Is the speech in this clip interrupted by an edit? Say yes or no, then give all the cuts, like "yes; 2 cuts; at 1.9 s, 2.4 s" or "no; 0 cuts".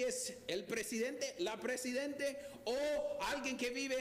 no; 0 cuts